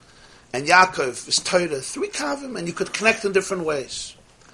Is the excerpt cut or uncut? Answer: uncut